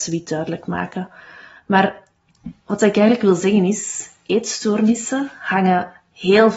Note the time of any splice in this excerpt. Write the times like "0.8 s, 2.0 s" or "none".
none